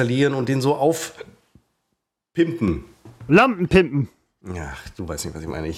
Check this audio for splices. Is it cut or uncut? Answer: uncut